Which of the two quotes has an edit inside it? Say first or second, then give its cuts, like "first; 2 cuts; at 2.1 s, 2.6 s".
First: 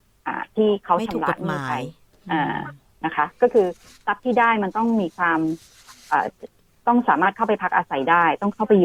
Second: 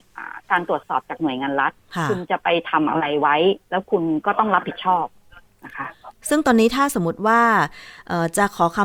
second; 1 cut; at 3.6 s